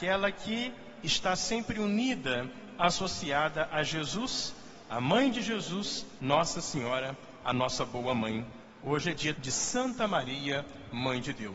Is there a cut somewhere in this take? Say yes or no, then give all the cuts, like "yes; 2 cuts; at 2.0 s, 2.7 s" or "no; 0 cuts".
yes; 2 cuts; at 6.2 s, 9.4 s